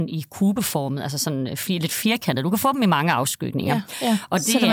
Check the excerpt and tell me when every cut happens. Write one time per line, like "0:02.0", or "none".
none